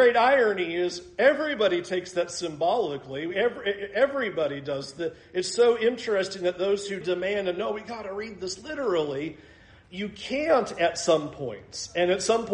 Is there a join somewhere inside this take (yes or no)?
yes